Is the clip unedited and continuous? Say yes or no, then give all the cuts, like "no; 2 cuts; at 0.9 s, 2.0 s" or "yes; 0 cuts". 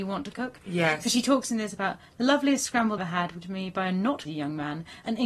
no; 3 cuts; at 3.0 s, 3.4 s, 4.2 s